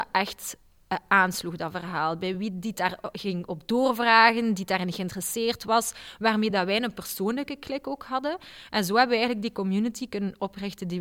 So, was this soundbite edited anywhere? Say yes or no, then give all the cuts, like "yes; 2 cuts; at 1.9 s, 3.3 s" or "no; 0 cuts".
no; 0 cuts